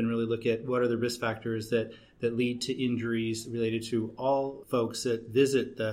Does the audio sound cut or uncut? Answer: cut